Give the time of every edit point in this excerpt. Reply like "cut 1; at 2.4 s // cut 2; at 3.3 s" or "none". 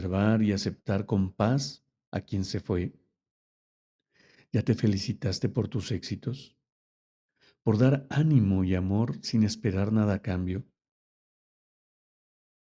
none